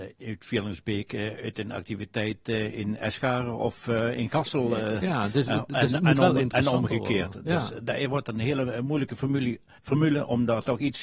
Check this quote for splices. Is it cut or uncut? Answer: uncut